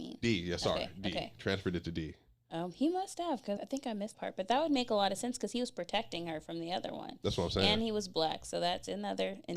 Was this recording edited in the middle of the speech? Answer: yes; 2 cuts; at 3.6 s, 4.1 s

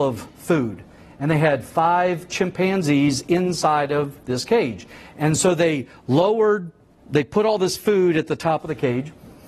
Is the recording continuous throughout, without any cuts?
yes; 0 cuts

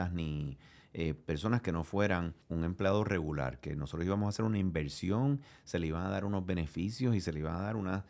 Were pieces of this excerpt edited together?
yes; 1 cut; at 2.4 s

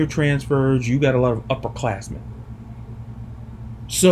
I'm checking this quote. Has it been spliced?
no; 0 cuts

